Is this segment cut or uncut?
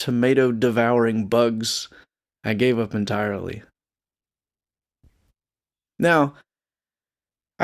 uncut